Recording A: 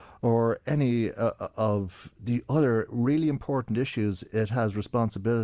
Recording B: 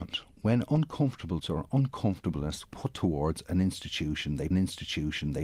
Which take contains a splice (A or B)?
B